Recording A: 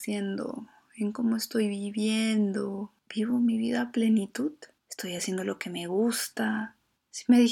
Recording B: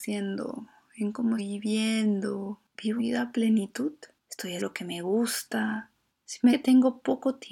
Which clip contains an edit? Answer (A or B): B